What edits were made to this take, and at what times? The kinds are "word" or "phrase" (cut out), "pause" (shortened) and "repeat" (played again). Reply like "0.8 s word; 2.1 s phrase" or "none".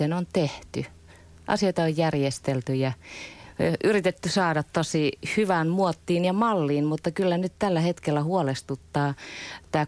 none